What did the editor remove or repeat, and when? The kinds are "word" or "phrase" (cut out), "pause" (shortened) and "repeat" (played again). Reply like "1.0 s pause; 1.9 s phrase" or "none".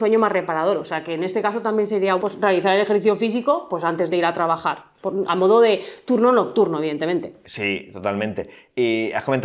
2.2 s word; 4.1 s word; 5.3 s word